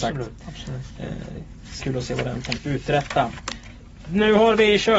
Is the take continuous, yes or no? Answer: no